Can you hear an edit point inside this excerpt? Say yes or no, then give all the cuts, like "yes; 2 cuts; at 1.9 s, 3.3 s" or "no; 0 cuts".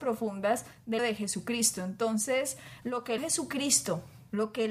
yes; 3 cuts; at 1.0 s, 2.8 s, 3.2 s